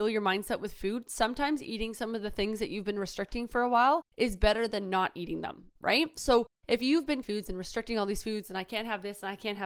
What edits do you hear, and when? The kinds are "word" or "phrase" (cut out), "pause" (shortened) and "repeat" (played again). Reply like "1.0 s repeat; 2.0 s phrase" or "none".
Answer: 4.1 s pause; 7.2 s phrase